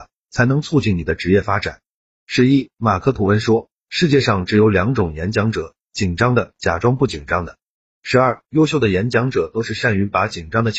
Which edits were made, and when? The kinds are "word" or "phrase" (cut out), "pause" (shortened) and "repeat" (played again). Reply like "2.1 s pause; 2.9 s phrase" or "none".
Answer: none

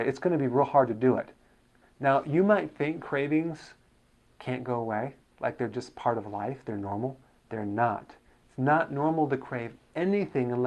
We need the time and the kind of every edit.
none

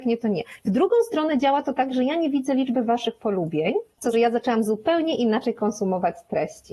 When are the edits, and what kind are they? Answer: 4.1 s phrase

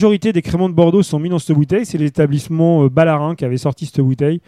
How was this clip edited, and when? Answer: none

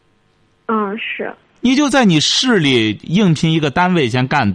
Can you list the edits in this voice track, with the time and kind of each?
none

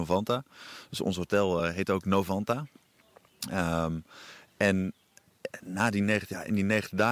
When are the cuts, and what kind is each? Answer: none

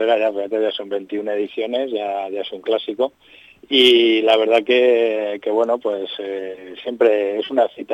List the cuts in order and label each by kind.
none

